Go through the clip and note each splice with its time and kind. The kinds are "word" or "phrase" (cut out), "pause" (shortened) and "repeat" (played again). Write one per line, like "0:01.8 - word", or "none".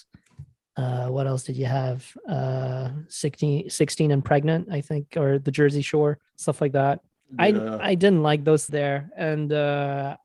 0:06.3 - pause
0:07.1 - pause
0:08.7 - phrase